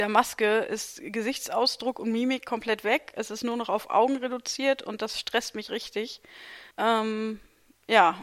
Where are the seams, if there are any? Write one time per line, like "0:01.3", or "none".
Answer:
0:06.7